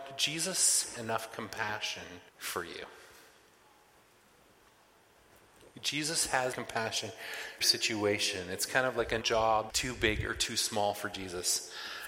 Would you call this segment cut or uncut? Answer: cut